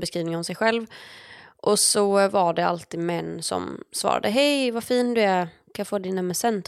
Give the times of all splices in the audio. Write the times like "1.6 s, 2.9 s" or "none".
none